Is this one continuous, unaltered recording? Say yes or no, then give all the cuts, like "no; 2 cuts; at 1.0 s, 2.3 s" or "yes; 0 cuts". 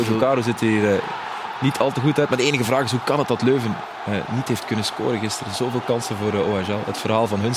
yes; 0 cuts